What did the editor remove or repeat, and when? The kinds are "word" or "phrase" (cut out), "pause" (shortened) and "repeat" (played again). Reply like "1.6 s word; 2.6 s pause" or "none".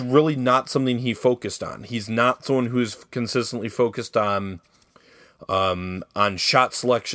none